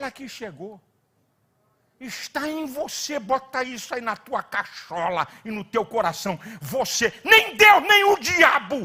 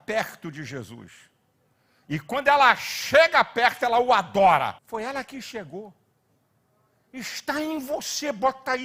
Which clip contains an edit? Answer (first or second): second